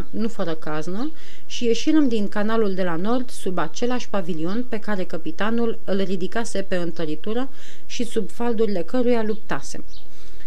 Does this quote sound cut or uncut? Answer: uncut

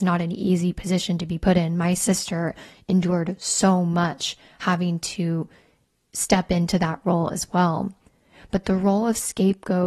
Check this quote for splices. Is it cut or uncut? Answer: uncut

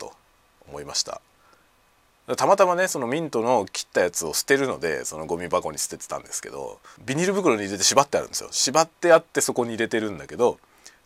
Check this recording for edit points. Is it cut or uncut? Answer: cut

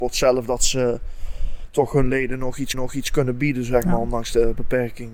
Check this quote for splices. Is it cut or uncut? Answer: cut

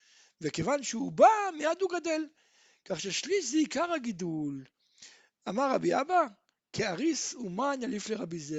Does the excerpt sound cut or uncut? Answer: uncut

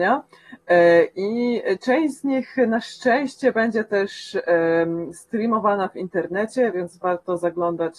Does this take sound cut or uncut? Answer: uncut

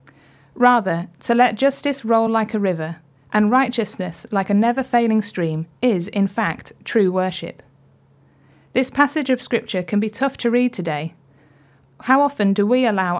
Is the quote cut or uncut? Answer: uncut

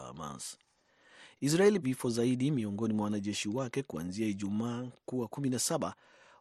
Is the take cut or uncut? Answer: cut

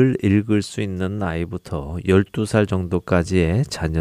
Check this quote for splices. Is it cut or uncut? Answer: uncut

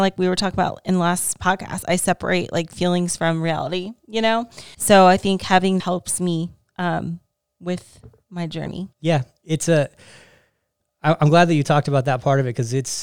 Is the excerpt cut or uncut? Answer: cut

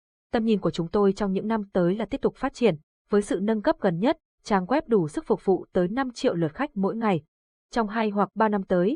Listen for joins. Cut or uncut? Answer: uncut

